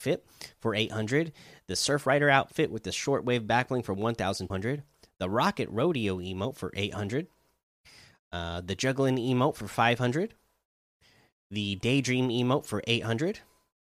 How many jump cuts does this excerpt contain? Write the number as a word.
one